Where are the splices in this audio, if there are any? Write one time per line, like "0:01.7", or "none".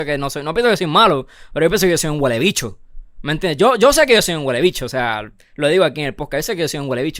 none